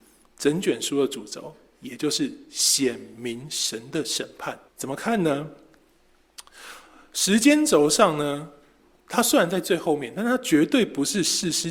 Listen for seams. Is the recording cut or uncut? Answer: cut